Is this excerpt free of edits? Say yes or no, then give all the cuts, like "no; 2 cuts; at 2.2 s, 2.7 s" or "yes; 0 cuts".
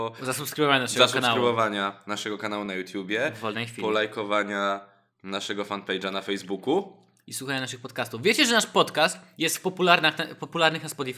yes; 0 cuts